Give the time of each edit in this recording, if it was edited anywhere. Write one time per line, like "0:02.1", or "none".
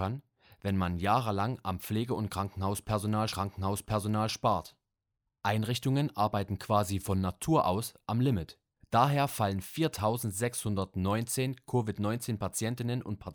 0:03.3
0:08.8